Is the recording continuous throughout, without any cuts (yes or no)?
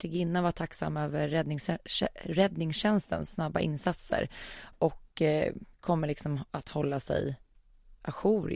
no